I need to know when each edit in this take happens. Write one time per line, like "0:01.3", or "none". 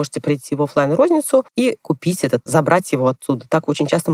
0:01.5
0:02.5